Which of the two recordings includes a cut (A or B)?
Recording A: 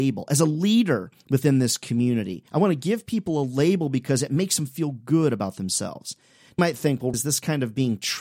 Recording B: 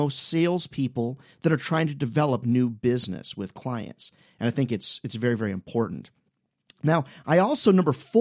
A